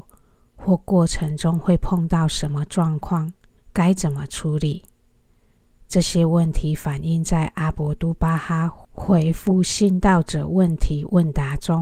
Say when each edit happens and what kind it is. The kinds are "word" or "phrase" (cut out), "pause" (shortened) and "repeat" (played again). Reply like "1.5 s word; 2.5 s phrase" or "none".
3.6 s pause